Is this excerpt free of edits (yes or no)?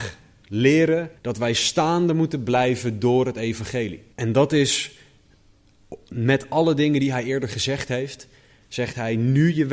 no